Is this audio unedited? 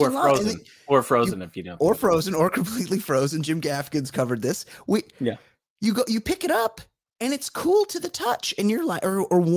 yes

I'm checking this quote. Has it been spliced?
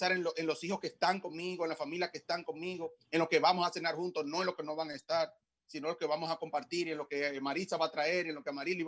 no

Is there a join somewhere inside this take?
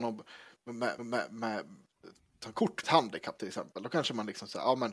yes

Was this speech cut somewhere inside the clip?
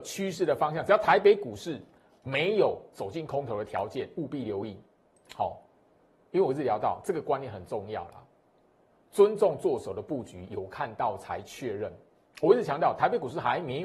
no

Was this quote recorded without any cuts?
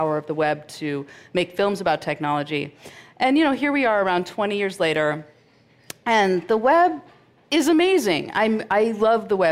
yes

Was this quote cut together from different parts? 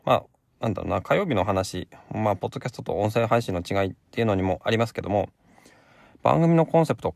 no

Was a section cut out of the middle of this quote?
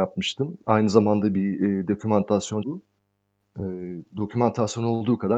yes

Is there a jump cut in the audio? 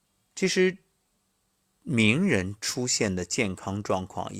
no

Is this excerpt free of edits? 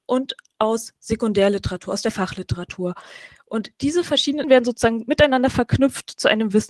no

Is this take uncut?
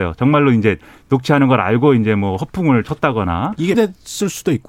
no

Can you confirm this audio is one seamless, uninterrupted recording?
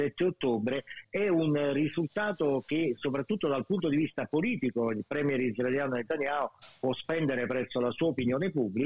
yes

